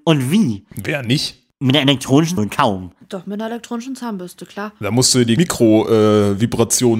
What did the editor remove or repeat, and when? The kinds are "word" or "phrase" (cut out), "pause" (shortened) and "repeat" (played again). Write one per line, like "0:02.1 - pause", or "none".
0:02.4 - phrase
0:05.4 - word